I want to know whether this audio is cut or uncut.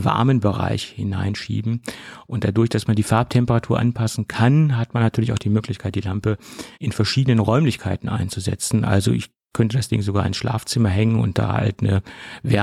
cut